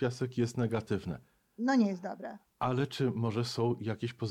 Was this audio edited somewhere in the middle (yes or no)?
no